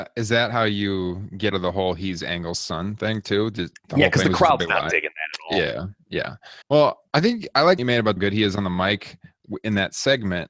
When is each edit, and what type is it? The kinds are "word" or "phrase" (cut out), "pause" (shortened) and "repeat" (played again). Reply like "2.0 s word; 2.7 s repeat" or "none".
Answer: 1.5 s word; 6.6 s pause; 7.8 s phrase; 8.2 s phrase